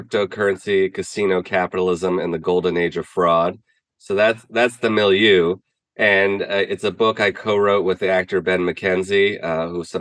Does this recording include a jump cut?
no; 0 cuts

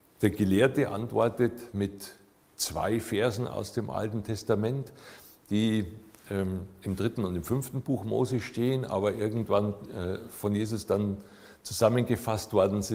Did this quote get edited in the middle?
no; 0 cuts

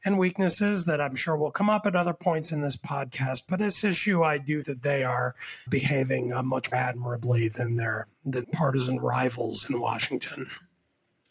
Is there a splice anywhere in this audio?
yes; 5 cuts; at 3.6 s, 4.6 s, 5.7 s, 6.7 s, 8.4 s

